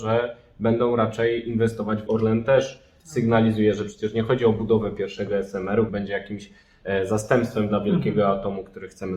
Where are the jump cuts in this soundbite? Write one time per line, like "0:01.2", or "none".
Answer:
0:02.1
0:05.9